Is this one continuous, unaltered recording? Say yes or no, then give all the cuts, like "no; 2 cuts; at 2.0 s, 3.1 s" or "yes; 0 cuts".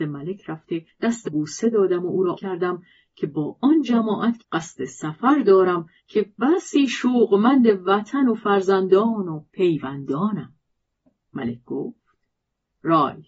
no; 5 cuts; at 1.2 s, 2.3 s, 4.4 s, 6.0 s, 9.5 s